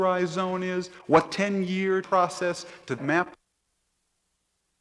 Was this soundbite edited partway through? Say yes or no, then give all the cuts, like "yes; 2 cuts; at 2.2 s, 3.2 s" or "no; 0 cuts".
yes; 3 cuts; at 1.2 s, 2.0 s, 3.0 s